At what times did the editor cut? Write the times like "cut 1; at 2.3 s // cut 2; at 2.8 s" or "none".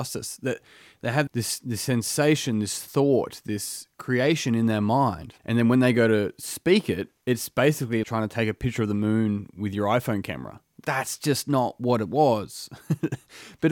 cut 1; at 1.3 s // cut 2; at 5.4 s // cut 3; at 8.0 s // cut 4; at 10.8 s